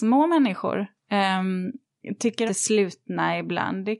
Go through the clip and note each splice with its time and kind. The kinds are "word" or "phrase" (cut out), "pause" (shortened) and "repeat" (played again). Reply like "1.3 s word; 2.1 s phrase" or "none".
2.5 s phrase